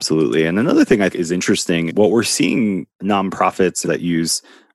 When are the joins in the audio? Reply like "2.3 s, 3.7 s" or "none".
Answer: 1.1 s, 1.9 s, 2.9 s, 3.8 s